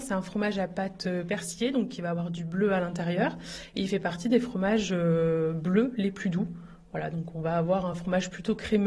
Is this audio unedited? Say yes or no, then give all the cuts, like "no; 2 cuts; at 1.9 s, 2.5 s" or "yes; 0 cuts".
yes; 0 cuts